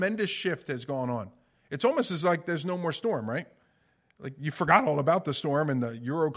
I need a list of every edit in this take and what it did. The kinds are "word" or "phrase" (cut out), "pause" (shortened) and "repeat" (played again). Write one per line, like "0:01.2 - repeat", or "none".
none